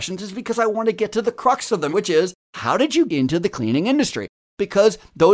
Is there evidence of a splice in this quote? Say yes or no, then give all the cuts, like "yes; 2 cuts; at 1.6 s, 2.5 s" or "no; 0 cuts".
yes; 3 cuts; at 1.9 s, 2.4 s, 3.1 s